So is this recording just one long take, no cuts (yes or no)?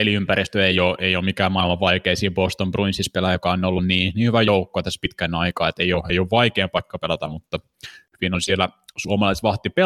yes